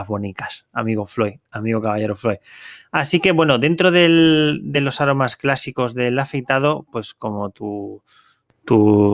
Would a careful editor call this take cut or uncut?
uncut